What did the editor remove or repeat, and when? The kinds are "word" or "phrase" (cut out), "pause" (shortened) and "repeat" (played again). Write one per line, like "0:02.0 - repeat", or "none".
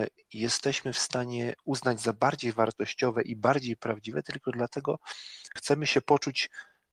0:05.6 - word

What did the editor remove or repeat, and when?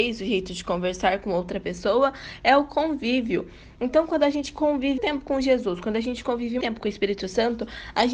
0:05.0 - word
0:06.6 - word

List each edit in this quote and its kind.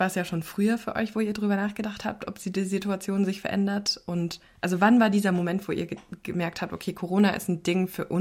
none

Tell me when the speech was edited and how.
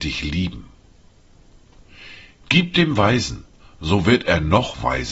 none

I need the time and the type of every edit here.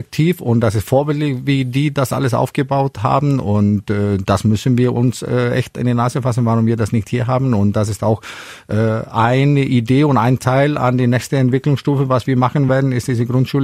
none

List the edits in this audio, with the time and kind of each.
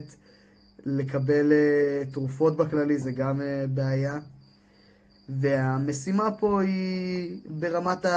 none

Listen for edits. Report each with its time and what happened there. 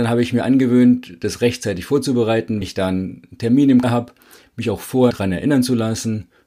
0:02.6 - word
0:03.8 - word
0:05.1 - word

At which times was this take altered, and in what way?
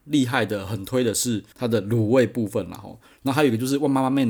0:01.5 - pause

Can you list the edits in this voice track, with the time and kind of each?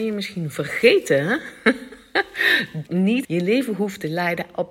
0:02.9 - phrase
0:03.2 - phrase

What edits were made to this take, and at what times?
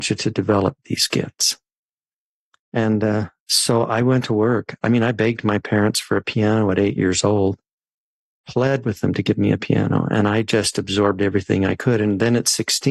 none

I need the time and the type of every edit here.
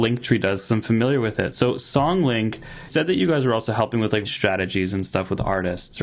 0:02.9 - word
0:04.2 - word

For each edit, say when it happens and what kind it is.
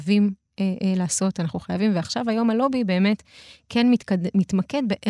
none

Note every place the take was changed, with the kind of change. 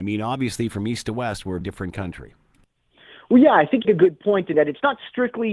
0:01.6 - word
0:03.8 - word
0:04.5 - word

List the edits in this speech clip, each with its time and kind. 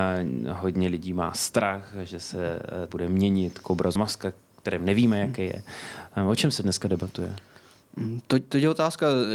0:02.9 - word
0:04.0 - word

